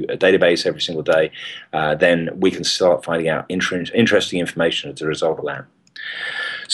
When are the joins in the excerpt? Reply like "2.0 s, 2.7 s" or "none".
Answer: 5.4 s